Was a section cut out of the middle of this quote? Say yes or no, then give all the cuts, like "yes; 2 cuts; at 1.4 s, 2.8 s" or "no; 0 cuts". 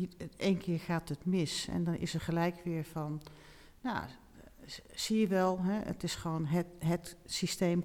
no; 0 cuts